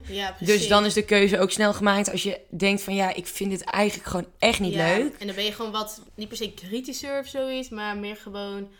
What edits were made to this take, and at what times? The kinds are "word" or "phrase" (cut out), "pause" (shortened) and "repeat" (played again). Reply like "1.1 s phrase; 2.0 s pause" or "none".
6.1 s pause